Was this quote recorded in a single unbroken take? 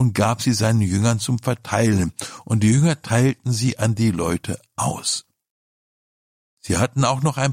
yes; 0 cuts

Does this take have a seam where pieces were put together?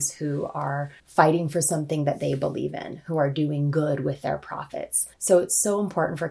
yes; 2 cuts; at 1.0 s, 5.1 s

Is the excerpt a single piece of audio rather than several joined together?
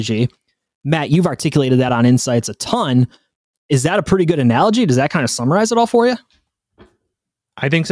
yes; 0 cuts

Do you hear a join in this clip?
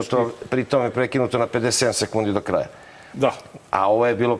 no; 0 cuts

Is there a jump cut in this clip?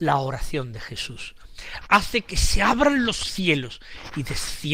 no; 0 cuts

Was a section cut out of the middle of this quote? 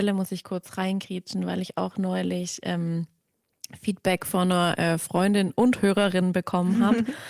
no; 0 cuts

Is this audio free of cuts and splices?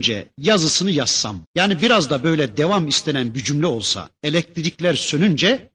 no; 1 cut; at 1.5 s

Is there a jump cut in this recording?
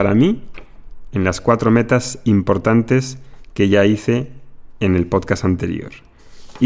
no; 0 cuts

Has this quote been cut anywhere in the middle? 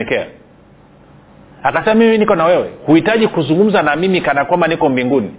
no; 0 cuts

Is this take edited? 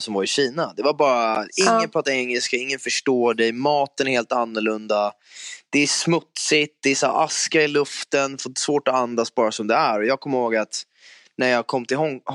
no; 0 cuts

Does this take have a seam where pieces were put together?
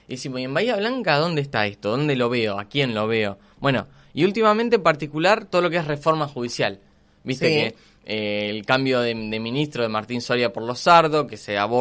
no; 0 cuts

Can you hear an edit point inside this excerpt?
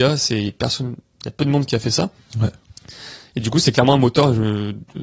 no; 0 cuts

